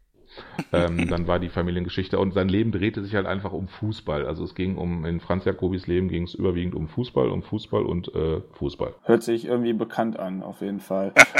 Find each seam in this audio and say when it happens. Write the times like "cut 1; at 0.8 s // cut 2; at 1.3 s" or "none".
cut 1; at 9.0 s